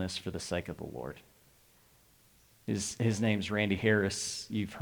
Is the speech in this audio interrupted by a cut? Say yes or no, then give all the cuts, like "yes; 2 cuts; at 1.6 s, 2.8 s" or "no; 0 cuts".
no; 0 cuts